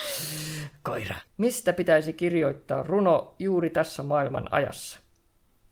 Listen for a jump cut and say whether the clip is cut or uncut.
cut